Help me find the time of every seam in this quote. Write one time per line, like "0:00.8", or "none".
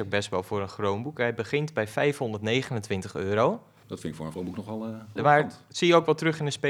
0:04.3
0:05.2